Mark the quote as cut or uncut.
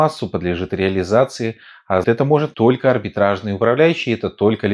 cut